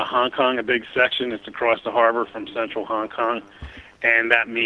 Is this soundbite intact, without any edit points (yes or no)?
yes